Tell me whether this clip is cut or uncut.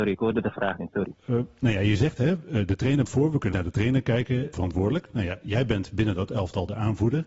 cut